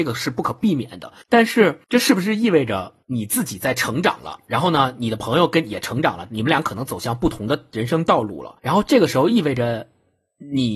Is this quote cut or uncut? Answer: cut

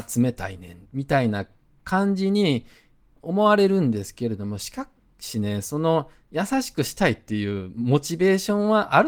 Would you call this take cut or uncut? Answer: uncut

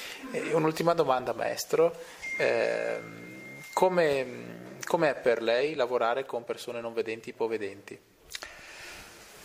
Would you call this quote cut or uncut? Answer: uncut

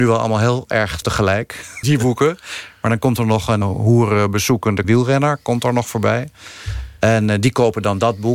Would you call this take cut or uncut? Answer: cut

